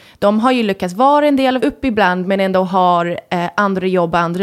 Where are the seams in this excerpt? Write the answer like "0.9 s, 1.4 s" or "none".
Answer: 1.6 s